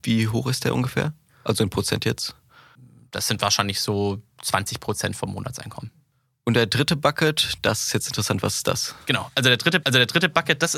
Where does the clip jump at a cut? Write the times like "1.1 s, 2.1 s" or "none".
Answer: 9.8 s